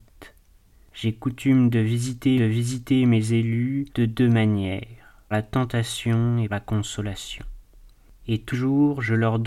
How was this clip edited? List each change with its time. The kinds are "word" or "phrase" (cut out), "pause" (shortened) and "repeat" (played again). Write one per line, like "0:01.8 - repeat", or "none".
0:02.4 - repeat
0:03.9 - pause
0:05.3 - word
0:06.5 - word
0:08.5 - word